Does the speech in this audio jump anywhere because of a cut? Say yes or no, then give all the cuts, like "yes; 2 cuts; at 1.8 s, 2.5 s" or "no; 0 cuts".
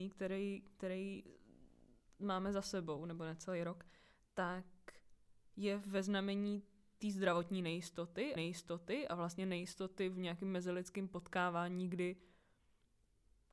yes; 1 cut; at 8.4 s